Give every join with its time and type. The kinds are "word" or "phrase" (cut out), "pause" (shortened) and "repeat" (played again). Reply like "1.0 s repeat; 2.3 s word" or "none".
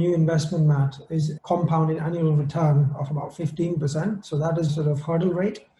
1.4 s word; 4.7 s word